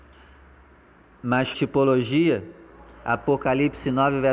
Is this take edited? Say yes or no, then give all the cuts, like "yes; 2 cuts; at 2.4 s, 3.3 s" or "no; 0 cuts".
yes; 1 cut; at 1.5 s